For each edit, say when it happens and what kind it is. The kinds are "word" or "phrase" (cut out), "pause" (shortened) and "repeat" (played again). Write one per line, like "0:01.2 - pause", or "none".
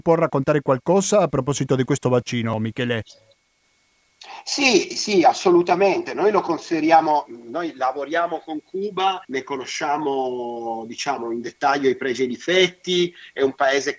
0:04.9 - word
0:09.2 - pause